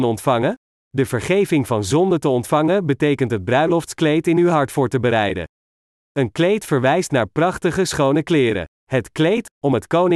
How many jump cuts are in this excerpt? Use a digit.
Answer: 1